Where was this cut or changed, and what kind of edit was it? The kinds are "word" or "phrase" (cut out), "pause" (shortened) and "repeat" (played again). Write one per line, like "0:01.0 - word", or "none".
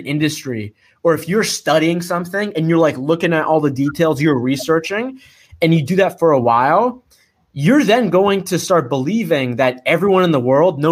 none